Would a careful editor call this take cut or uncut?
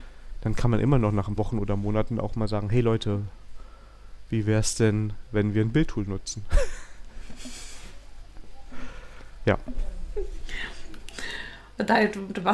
cut